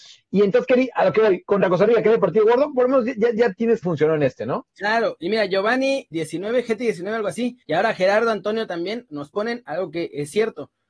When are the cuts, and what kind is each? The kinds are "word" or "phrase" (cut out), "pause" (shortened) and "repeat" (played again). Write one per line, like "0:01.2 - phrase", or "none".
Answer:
0:03.8 - phrase
0:06.1 - word
0:07.6 - pause